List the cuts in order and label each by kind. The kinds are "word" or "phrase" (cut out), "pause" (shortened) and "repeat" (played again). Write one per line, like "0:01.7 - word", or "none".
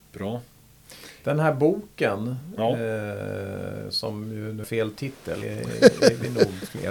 0:04.6 - word
0:05.4 - phrase